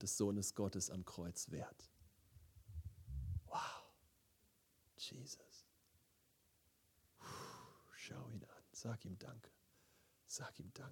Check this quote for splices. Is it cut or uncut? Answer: uncut